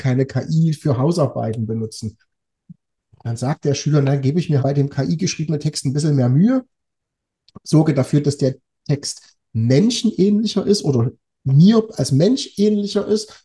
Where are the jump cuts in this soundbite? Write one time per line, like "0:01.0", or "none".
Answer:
0:04.6